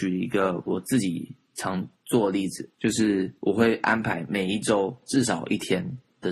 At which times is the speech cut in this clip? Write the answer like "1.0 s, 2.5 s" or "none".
1.9 s, 2.7 s, 3.4 s